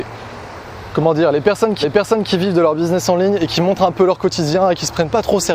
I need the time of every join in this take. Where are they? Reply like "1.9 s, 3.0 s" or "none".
1.8 s